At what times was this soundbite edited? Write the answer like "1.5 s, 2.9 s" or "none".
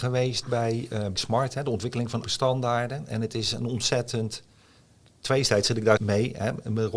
1.2 s, 2.2 s, 6.0 s